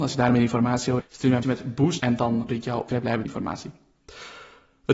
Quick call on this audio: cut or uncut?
cut